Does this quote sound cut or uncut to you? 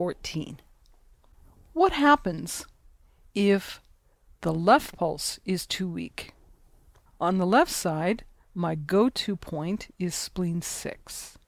uncut